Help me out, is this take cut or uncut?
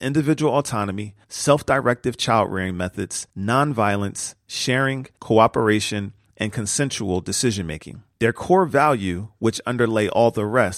cut